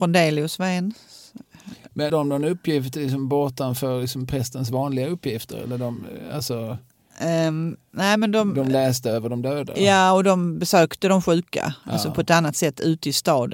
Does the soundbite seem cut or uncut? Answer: cut